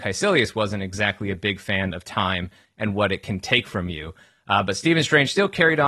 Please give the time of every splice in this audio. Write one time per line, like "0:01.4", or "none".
none